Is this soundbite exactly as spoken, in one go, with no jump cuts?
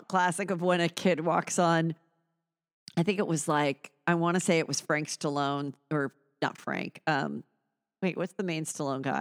yes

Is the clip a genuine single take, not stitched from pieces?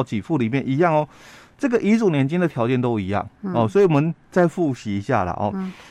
yes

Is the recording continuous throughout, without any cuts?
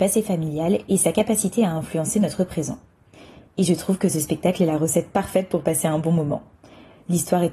yes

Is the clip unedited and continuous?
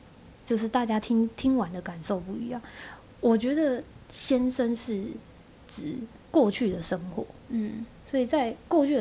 no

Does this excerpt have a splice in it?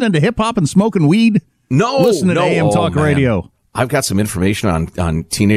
no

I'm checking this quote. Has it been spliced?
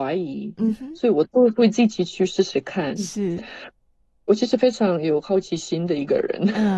no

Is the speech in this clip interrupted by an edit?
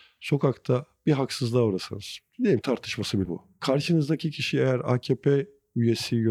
yes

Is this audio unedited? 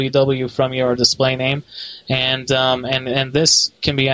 yes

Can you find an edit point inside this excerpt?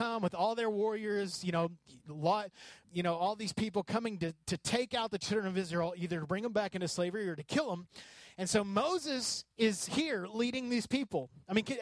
yes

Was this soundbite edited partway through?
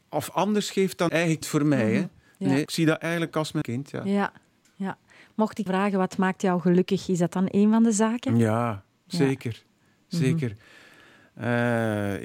yes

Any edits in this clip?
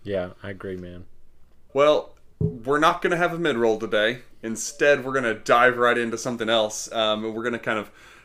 yes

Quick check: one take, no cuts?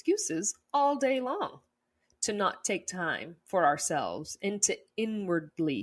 yes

